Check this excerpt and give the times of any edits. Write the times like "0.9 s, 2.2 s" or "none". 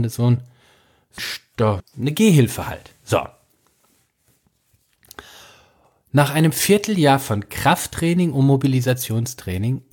1.2 s, 1.8 s